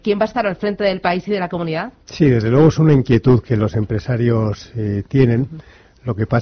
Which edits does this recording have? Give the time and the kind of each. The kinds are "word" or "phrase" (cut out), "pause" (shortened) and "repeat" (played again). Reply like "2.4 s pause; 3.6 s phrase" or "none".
2.0 s pause